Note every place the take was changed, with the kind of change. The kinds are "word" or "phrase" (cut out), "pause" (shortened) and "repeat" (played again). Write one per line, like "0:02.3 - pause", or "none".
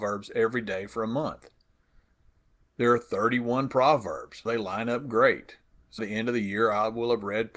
0:04.5 - word
0:06.0 - word